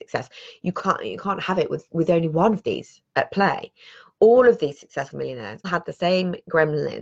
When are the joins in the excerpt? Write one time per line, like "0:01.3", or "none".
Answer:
0:01.9
0:05.1
0:05.6